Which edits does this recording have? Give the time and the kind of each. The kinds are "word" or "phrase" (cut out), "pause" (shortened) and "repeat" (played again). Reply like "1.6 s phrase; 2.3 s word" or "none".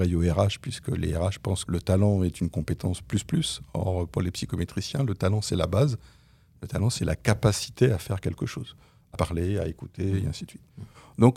1.6 s word; 9.1 s phrase